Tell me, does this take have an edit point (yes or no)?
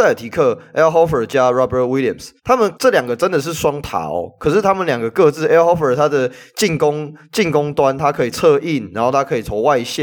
yes